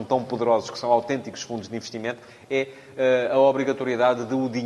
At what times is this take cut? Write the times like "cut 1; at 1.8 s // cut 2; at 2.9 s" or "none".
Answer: none